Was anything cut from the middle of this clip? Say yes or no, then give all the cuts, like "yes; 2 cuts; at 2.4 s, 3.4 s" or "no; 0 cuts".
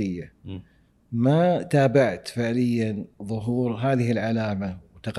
no; 0 cuts